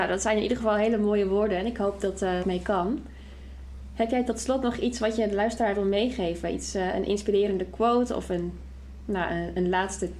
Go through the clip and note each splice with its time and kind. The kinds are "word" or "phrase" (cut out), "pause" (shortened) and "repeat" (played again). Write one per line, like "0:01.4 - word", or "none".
0:02.4 - phrase